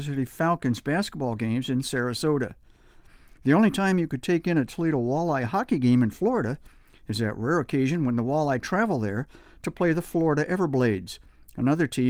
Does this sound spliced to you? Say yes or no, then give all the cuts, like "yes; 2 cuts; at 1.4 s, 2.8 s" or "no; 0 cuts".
no; 0 cuts